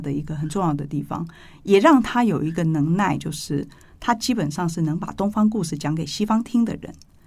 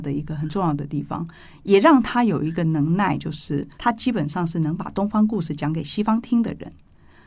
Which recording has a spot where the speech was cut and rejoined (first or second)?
second